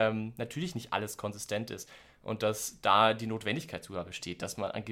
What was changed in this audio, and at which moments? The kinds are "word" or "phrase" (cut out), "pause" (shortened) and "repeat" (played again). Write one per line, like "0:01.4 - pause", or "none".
none